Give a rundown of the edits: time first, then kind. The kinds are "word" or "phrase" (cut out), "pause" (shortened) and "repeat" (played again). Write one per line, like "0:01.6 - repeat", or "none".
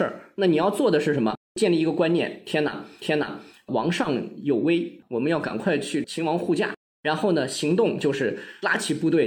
0:03.0 - repeat